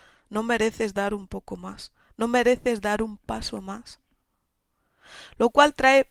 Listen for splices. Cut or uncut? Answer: uncut